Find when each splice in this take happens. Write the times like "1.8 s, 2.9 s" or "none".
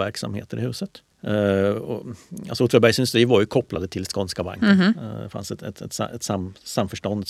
1.1 s